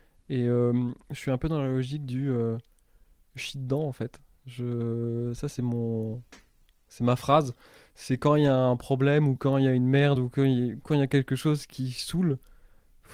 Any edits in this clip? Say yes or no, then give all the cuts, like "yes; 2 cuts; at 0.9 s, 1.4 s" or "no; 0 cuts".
no; 0 cuts